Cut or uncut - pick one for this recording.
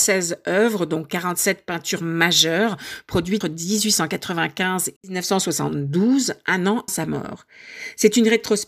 cut